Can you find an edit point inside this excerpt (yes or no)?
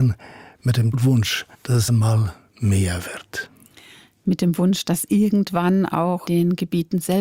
yes